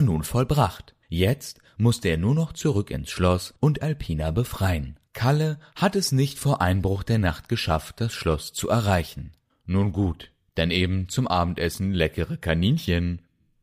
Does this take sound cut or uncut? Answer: cut